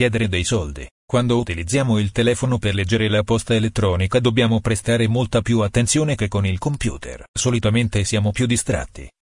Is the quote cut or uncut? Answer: cut